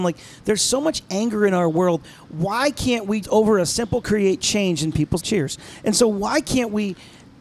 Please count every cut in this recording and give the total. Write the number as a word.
three